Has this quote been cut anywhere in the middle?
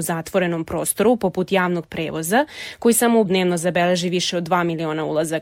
yes; 1 cut; at 3.3 s

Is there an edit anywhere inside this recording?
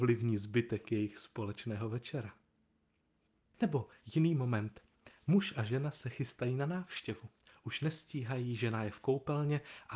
no; 0 cuts

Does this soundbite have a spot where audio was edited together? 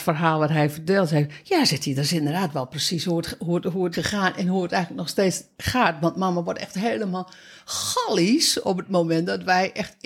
yes; 1 cut; at 3.9 s

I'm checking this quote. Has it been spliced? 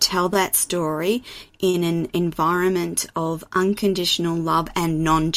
no; 0 cuts

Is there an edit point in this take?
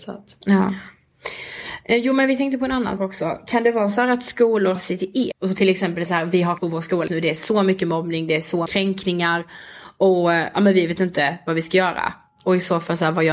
yes; 7 cuts; at 3.0 s, 4.8 s, 5.3 s, 6.1 s, 6.6 s, 7.1 s, 8.7 s

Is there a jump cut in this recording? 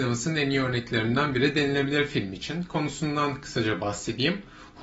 no; 0 cuts

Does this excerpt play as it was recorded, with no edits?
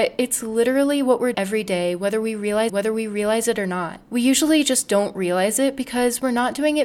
no; 3 cuts; at 1.3 s, 2.7 s, 4.0 s

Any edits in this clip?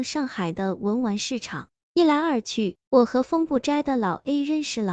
yes; 1 cut; at 2.8 s

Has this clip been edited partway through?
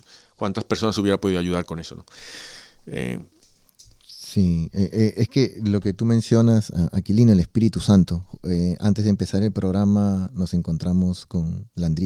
no; 0 cuts

